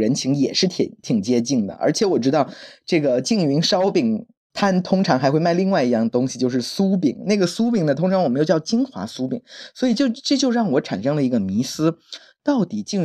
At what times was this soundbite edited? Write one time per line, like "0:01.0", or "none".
0:04.4